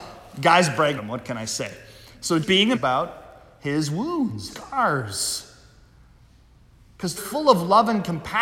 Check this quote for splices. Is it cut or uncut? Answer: cut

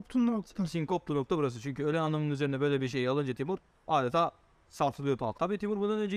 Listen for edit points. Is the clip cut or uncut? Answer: uncut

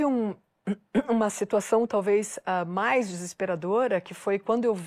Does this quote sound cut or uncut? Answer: uncut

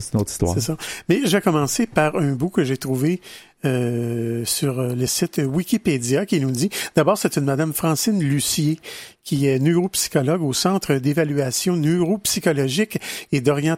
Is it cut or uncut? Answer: uncut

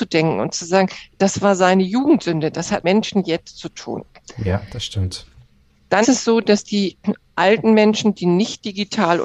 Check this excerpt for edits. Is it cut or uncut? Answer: cut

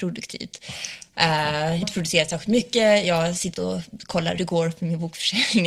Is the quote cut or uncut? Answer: cut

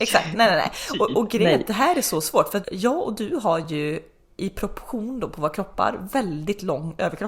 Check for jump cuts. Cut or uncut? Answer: cut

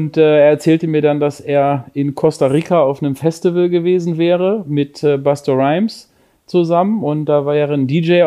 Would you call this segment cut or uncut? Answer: uncut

